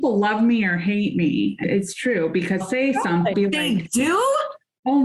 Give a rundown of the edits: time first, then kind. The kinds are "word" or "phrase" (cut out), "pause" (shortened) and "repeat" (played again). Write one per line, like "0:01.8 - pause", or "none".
0:01.6 - word
0:02.6 - word
0:03.3 - phrase

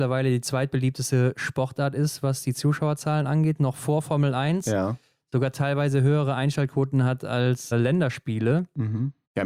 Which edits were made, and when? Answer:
0:07.7 - word

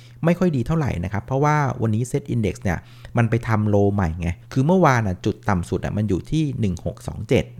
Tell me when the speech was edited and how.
0:04.4 - pause

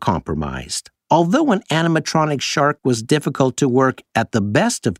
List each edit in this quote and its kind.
0:01.0 - pause

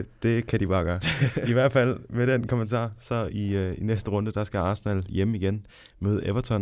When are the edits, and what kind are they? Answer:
none

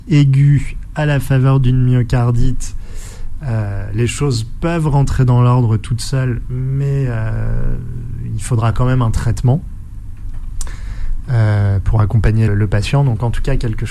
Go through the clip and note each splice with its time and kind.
0:12.5 - word

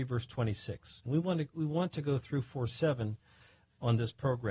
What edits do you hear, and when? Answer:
none

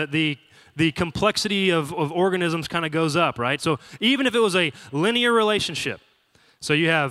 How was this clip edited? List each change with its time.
none

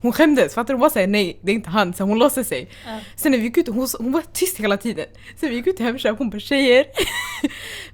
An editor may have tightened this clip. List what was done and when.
none

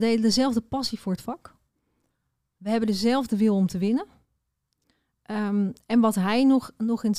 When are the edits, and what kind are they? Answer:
none

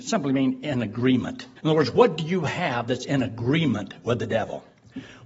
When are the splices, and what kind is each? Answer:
0:01.6 - pause

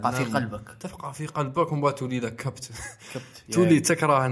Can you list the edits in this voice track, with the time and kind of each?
none

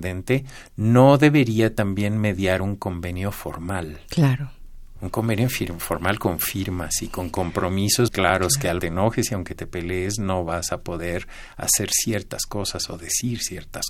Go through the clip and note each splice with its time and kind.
0:08.1 - word
0:08.8 - phrase

